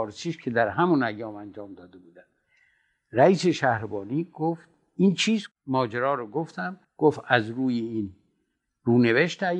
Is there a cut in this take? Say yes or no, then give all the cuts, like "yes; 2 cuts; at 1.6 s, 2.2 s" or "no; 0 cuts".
yes; 1 cut; at 6.8 s